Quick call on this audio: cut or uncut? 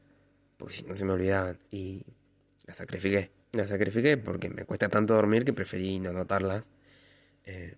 cut